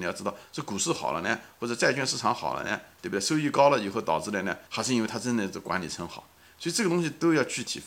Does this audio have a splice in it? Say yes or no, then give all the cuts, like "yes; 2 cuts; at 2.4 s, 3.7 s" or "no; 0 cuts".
yes; 1 cut; at 4.7 s